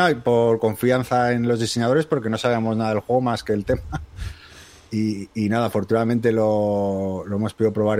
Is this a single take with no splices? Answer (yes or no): yes